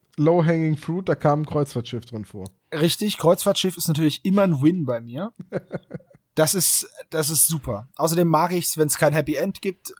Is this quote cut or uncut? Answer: uncut